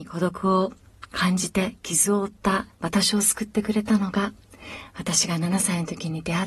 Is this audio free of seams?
no; 1 cut; at 2.7 s

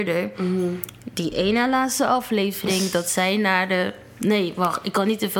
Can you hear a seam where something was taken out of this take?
no; 0 cuts

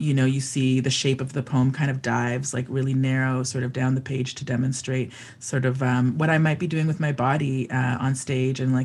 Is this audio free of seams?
yes; 0 cuts

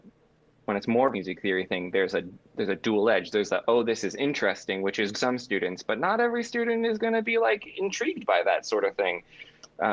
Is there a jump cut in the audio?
yes; 2 cuts; at 1.1 s, 5.1 s

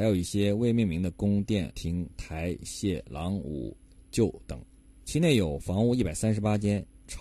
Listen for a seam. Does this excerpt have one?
yes; 2 cuts; at 1.7 s, 4.8 s

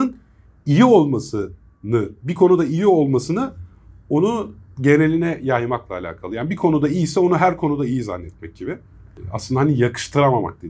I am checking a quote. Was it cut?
no; 0 cuts

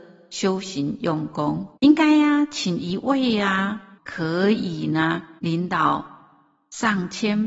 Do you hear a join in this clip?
yes; 3 cuts; at 1.8 s, 4.0 s, 5.4 s

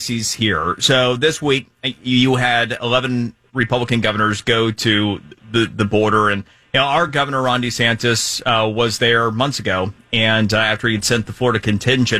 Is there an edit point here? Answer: no; 0 cuts

